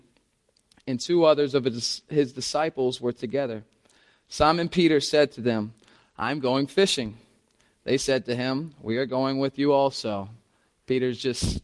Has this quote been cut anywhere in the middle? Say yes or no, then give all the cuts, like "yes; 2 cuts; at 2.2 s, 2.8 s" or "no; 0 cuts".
no; 0 cuts